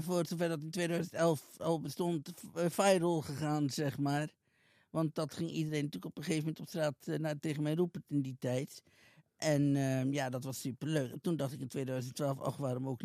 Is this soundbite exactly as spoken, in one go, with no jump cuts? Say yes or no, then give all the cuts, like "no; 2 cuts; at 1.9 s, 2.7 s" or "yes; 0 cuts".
yes; 0 cuts